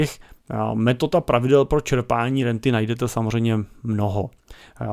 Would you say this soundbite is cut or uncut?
uncut